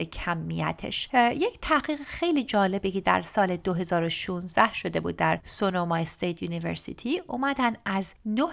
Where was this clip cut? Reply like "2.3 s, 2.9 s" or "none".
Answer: none